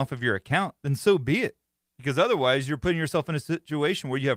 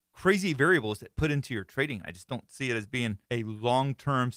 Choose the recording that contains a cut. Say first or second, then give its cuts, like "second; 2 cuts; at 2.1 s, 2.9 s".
second; 1 cut; at 3.2 s